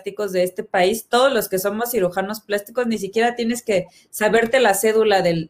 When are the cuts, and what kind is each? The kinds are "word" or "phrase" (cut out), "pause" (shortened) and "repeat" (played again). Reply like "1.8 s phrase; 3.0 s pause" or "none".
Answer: none